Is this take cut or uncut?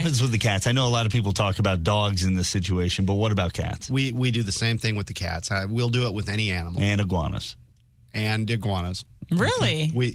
uncut